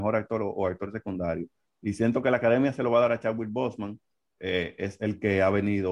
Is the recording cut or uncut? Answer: uncut